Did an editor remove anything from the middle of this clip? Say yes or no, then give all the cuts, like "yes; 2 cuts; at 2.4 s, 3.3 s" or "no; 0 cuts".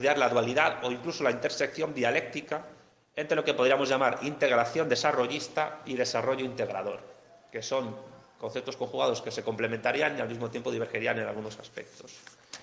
no; 0 cuts